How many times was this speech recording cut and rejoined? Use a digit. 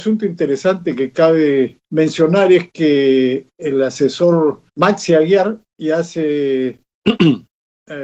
3